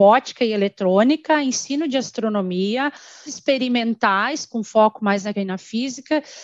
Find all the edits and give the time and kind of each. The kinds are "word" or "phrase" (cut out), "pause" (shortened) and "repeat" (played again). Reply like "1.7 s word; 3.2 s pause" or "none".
3.3 s word; 5.3 s word